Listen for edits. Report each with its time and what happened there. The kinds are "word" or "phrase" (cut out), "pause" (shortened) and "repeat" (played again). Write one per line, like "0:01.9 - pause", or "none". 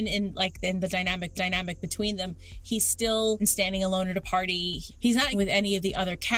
0:01.3 - repeat
0:03.4 - word
0:05.3 - word

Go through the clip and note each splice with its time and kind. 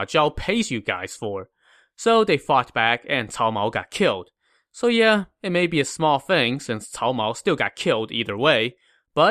none

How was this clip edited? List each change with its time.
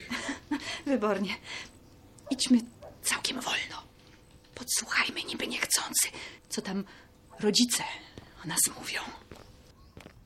0:06.4 - pause

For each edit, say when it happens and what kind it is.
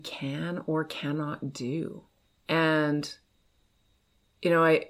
0:02.2 - pause

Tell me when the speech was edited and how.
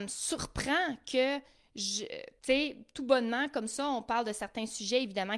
0:02.4 - pause

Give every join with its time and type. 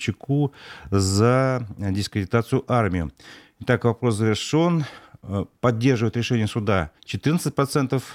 0:07.0 - pause

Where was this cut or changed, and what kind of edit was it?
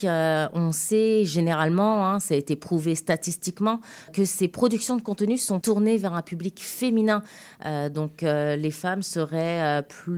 0:04.1 - word
0:05.6 - word

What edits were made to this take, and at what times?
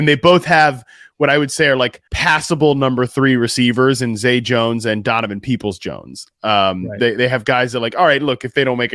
0:02.1 - pause

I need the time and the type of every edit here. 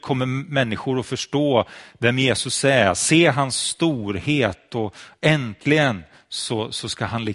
none

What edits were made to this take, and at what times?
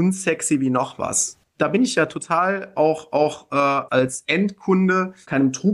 0:03.9 - word

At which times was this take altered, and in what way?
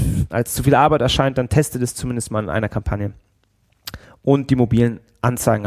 0:04.0 - pause

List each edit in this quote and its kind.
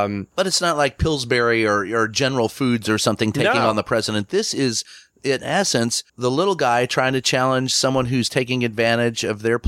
0:06.1 - pause

